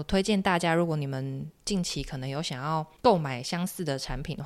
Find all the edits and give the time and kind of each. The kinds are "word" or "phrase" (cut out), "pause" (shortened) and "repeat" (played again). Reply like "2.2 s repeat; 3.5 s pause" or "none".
3.0 s pause